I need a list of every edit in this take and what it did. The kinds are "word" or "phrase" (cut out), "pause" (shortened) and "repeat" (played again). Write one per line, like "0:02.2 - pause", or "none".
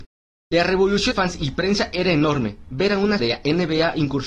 0:01.1 - word
0:03.2 - word